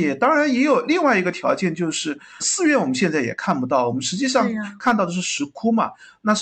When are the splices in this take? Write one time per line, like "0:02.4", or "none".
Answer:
0:02.4